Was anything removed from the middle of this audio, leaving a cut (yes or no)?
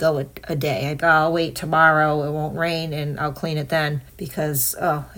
yes